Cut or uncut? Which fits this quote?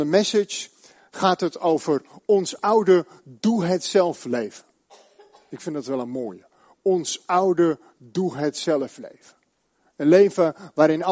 uncut